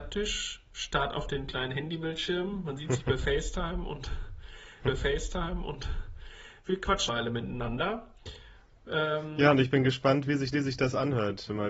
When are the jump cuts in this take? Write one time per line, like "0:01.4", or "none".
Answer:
0:04.8
0:07.1
0:10.5